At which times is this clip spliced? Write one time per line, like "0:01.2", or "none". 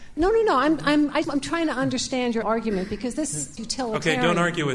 0:01.2
0:02.4
0:03.6